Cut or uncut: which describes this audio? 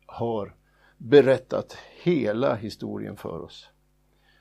uncut